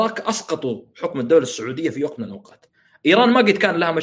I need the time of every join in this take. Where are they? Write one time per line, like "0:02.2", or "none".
none